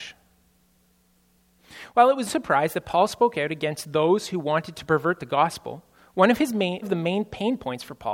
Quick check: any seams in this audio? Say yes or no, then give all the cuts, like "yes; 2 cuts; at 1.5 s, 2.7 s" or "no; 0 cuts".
yes; 2 cuts; at 2.3 s, 6.8 s